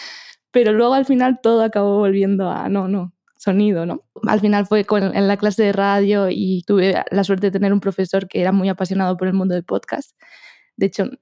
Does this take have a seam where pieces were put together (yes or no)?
no